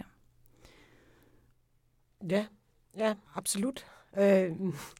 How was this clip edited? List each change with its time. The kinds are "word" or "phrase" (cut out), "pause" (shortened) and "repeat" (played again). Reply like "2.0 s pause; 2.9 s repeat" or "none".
3.2 s pause